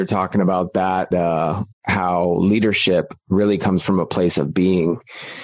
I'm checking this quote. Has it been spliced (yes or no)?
yes